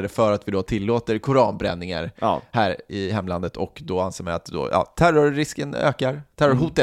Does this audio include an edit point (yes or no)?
no